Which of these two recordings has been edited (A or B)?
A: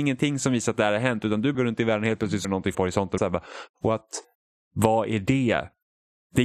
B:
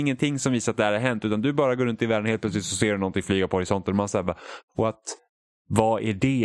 A